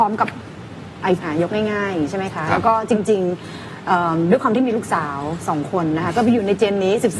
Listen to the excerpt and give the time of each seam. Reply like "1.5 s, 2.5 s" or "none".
1.2 s

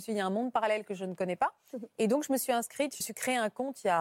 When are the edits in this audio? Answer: 3.0 s

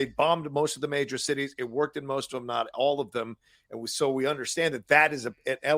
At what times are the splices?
none

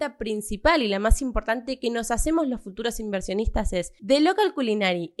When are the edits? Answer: none

